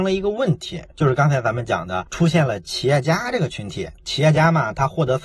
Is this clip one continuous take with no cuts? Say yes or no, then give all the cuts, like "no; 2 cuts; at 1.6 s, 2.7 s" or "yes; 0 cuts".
no; 1 cut; at 4.0 s